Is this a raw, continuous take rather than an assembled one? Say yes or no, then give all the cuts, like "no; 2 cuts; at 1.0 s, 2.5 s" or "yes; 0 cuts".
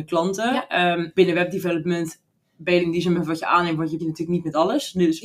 no; 4 cuts; at 1.2 s, 2.8 s, 3.2 s, 4.0 s